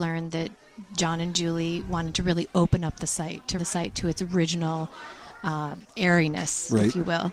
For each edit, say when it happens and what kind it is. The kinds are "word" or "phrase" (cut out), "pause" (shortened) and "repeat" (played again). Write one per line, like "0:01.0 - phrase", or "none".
0:03.6 - word
0:05.8 - pause